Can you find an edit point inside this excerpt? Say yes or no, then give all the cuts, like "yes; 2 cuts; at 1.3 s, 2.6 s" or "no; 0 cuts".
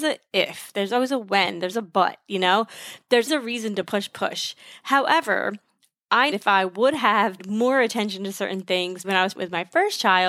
yes; 7 cuts; at 1.7 s, 3.3 s, 3.9 s, 6.3 s, 7.4 s, 9.0 s, 9.4 s